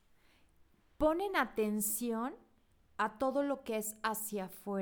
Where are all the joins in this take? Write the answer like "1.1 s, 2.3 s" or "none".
none